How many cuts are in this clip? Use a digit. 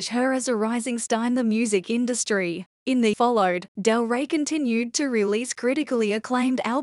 2